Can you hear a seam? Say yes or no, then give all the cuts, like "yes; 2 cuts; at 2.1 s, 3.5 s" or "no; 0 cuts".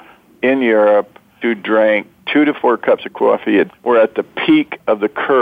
yes; 2 cuts; at 1.4 s, 3.7 s